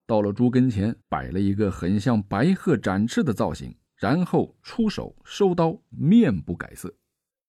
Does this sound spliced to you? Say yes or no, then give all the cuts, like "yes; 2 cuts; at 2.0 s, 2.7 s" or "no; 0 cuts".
yes; 3 cuts; at 1.0 s, 3.9 s, 5.9 s